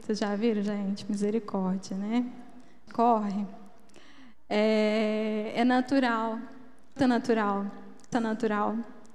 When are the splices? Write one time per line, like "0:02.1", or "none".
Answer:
0:02.9
0:07.0
0:08.1